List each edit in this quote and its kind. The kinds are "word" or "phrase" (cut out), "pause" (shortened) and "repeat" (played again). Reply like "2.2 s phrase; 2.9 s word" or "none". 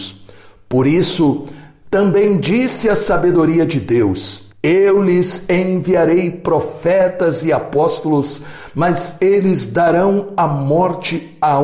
4.5 s pause